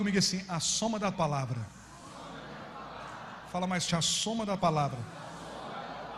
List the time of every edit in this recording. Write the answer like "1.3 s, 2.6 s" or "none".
1.1 s, 3.9 s, 4.6 s